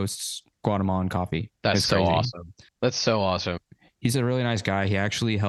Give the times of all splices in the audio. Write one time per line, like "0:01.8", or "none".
0:01.6